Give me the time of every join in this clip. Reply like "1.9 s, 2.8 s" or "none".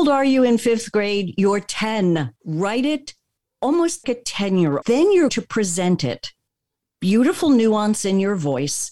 2.4 s, 4.0 s, 4.8 s, 5.3 s, 6.9 s